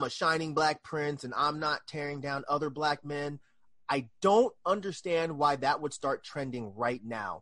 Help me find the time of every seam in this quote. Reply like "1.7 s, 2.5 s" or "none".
none